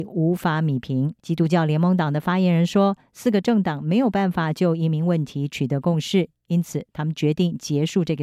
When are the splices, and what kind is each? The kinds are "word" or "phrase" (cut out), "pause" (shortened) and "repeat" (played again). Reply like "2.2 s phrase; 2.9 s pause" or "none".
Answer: 1.2 s pause